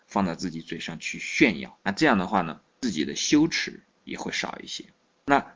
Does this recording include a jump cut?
yes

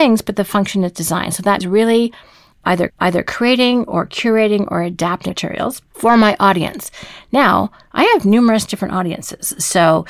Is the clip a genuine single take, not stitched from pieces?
no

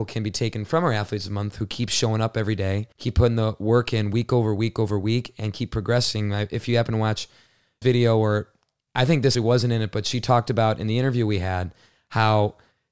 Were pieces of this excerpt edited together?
yes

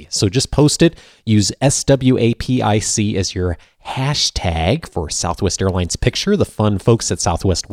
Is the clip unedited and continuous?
yes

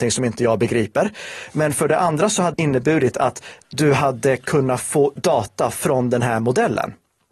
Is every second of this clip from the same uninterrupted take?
no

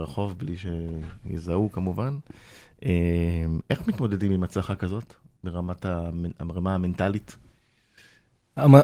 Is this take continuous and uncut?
yes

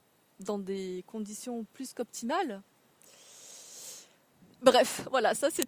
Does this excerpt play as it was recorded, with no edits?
yes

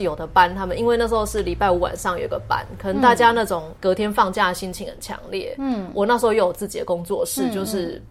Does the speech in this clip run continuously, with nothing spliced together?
no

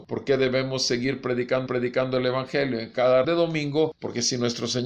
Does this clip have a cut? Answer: yes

